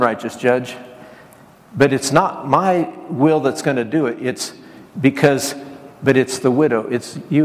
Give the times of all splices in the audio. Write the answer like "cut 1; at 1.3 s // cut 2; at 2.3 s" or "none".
none